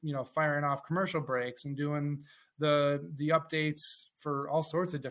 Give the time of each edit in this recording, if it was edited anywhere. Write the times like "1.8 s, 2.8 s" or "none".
none